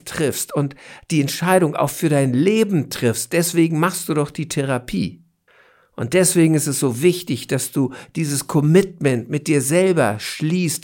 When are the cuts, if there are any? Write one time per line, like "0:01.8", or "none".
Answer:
0:05.5